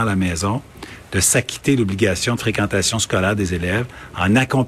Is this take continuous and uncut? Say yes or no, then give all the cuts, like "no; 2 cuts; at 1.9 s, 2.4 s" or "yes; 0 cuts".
yes; 0 cuts